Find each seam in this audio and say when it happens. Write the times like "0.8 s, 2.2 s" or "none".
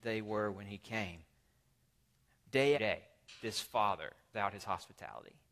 2.7 s, 4.3 s